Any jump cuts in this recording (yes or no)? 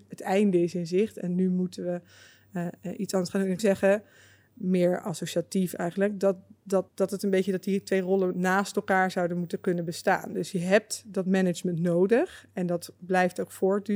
yes